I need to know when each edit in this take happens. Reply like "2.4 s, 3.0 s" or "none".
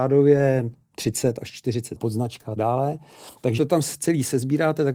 1.9 s, 2.6 s, 3.6 s